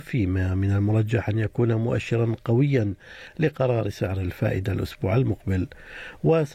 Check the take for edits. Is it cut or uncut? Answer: uncut